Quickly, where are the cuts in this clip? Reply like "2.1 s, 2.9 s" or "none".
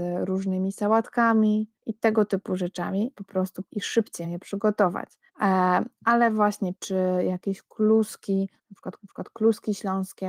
1.8 s, 3.2 s, 3.7 s, 4.2 s, 5.3 s, 6.8 s, 8.6 s, 9.0 s